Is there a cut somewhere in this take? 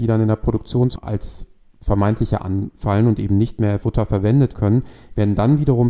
yes; 4 cuts; at 1.0 s, 2.4 s, 3.8 s, 4.5 s

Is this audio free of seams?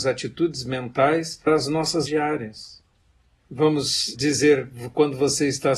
no; 3 cuts; at 1.5 s, 2.1 s, 4.1 s

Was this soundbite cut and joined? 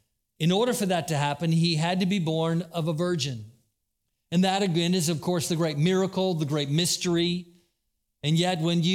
no; 0 cuts

